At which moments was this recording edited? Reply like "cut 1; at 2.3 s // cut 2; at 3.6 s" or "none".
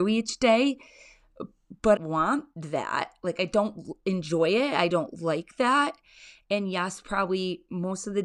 cut 1; at 2.0 s